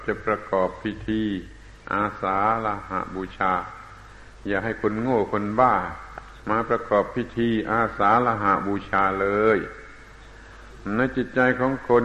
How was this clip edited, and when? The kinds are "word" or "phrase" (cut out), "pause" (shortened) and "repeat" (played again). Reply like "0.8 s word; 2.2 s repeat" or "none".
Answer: 6.4 s pause